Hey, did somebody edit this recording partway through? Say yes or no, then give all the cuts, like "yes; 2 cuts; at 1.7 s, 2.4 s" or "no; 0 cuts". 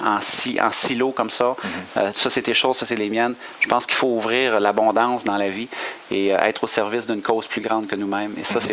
no; 0 cuts